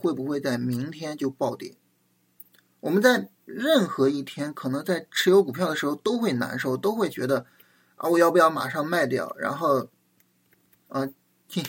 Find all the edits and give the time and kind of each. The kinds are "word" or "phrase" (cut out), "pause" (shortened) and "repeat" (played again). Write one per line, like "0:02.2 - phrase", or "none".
none